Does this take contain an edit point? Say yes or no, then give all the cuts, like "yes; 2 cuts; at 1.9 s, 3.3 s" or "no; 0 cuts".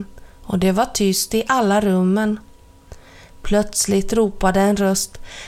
no; 0 cuts